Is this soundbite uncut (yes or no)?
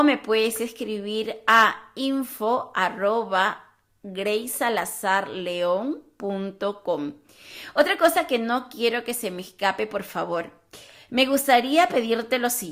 yes